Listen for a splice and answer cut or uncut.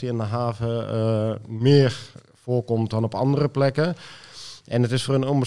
uncut